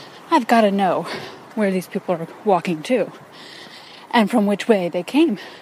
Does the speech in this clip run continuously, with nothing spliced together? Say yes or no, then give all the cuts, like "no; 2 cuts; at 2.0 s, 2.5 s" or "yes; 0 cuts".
yes; 0 cuts